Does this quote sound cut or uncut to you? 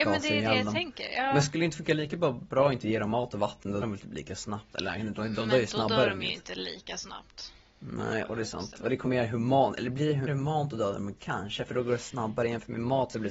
cut